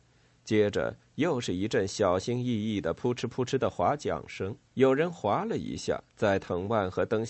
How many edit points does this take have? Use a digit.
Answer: 2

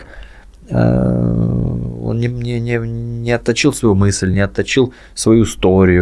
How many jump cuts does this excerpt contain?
0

